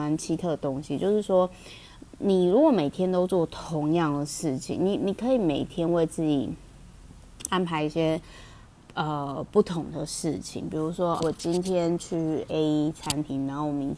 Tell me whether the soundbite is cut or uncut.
cut